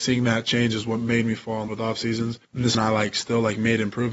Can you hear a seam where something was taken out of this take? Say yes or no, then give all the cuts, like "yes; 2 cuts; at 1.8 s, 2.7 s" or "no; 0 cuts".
yes; 3 cuts; at 1.7 s, 2.4 s, 2.7 s